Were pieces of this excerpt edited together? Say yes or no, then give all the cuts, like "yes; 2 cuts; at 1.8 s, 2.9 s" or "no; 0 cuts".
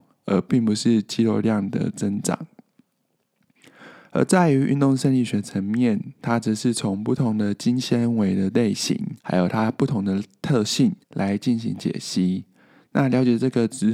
yes; 2 cuts; at 9.2 s, 11.0 s